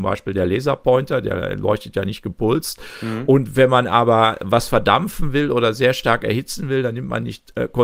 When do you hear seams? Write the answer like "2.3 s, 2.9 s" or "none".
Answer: none